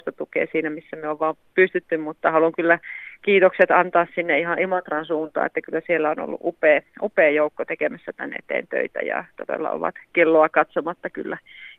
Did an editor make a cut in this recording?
no; 0 cuts

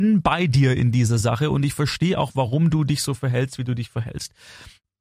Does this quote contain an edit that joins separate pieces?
no; 0 cuts

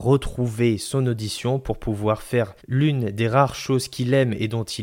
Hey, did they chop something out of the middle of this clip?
yes; 1 cut; at 2.6 s

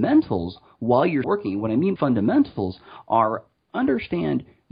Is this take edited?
yes; 2 cuts; at 1.2 s, 2.0 s

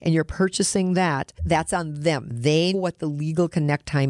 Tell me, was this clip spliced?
yes; 2 cuts; at 1.4 s, 2.7 s

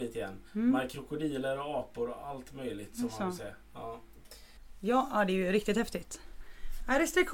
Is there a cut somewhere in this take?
no; 0 cuts

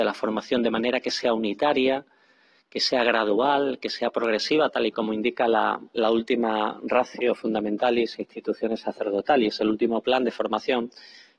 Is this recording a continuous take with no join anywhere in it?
yes; 0 cuts

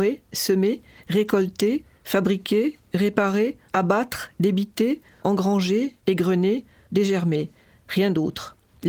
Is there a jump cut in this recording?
no; 0 cuts

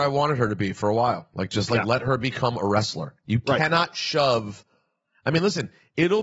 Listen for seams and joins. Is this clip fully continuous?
yes; 0 cuts

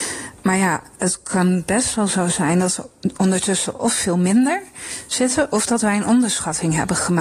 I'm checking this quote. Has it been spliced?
no; 0 cuts

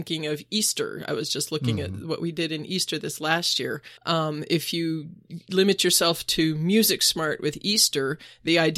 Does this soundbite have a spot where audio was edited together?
yes; 1 cut; at 4.0 s

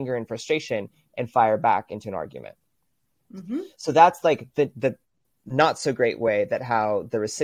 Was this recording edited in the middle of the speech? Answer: no; 0 cuts

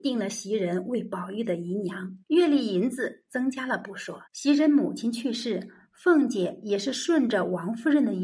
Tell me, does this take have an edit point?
yes; 2 cuts; at 2.2 s, 4.3 s

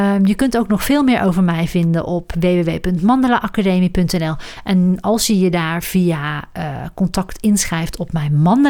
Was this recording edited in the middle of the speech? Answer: no; 0 cuts

